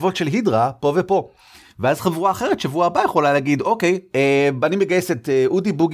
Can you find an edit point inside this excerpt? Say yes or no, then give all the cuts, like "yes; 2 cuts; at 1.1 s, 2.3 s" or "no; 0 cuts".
no; 0 cuts